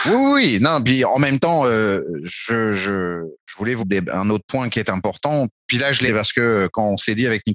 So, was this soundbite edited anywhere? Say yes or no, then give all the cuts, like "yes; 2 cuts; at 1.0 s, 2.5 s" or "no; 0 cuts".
yes; 4 cuts; at 3.4 s, 3.8 s, 5.6 s, 6.1 s